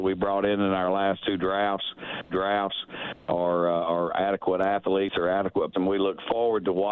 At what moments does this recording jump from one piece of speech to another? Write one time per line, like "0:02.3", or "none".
0:02.3
0:05.7